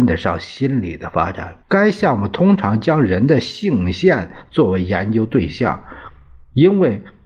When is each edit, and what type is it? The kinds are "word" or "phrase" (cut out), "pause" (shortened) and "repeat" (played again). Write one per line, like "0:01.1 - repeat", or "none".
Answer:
0:01.6 - pause